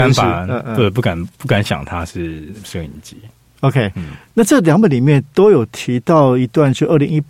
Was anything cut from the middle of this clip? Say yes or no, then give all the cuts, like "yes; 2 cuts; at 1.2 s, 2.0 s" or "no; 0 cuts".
no; 0 cuts